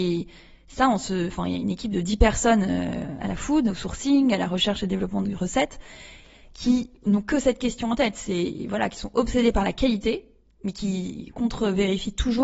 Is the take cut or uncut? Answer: uncut